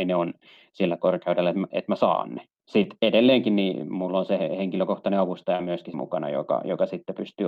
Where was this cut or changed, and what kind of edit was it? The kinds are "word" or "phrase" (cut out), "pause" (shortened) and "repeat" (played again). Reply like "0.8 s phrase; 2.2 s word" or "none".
5.9 s word